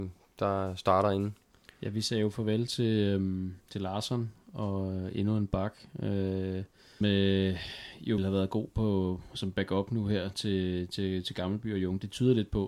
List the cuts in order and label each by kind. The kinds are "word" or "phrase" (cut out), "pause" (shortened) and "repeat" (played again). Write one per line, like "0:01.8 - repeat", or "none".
0:01.5 - pause
0:03.6 - pause
0:07.0 - word
0:08.2 - word

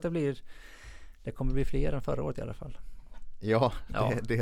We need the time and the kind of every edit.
none

